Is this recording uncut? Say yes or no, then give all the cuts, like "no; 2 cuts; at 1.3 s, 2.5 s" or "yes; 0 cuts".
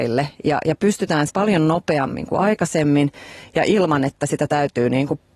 no; 1 cut; at 1.3 s